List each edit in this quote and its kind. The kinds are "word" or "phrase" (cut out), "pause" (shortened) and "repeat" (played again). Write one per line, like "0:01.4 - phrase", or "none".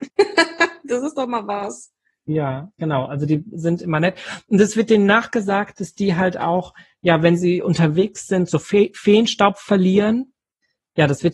none